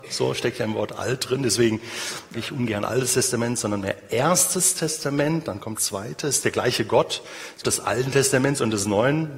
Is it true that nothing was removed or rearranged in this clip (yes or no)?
no